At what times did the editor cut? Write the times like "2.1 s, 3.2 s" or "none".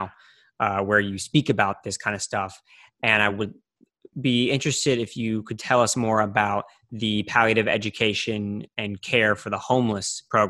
none